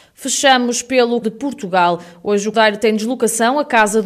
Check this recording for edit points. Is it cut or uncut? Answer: cut